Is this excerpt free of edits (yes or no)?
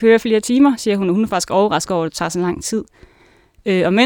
yes